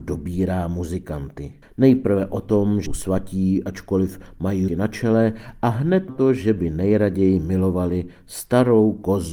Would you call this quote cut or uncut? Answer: cut